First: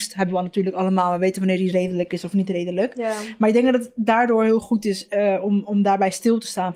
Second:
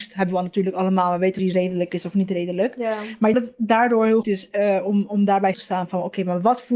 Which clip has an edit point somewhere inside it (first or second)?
second